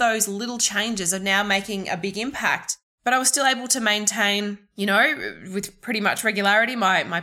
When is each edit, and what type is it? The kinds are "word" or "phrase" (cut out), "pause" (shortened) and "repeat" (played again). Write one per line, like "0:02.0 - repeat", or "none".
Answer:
none